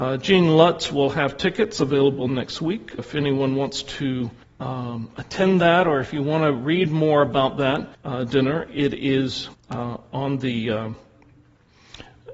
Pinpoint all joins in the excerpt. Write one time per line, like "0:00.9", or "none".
0:03.0
0:04.4
0:07.9
0:09.5